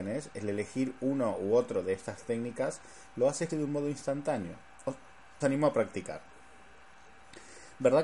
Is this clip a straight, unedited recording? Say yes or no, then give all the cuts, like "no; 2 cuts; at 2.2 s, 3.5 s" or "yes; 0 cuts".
no; 2 cuts; at 3.5 s, 5.4 s